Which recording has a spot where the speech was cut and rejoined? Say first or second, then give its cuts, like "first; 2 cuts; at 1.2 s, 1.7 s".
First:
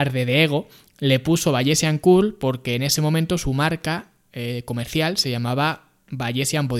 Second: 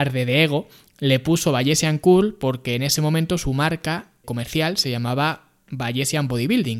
second; 1 cut; at 4.2 s